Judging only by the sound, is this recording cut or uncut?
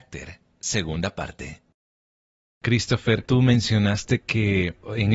uncut